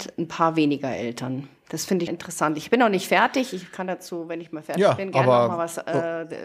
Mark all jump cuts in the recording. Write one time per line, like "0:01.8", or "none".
0:02.1